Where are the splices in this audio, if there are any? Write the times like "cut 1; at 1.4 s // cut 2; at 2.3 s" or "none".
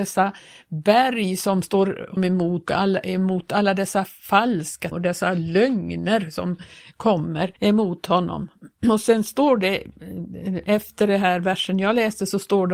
cut 1; at 2.2 s // cut 2; at 2.7 s // cut 3; at 4.9 s // cut 4; at 7.6 s